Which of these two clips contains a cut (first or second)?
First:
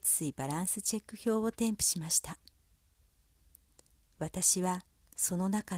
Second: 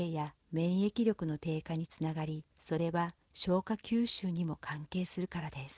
second